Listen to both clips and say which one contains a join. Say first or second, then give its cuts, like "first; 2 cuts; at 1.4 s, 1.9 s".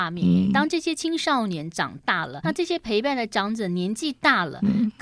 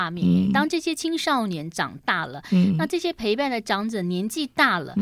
first; 1 cut; at 2.4 s